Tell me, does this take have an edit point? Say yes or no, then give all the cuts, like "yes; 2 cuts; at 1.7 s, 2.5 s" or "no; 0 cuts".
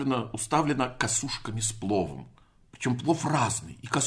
yes; 1 cut; at 2.4 s